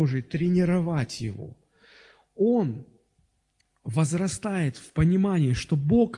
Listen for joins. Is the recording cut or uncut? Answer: uncut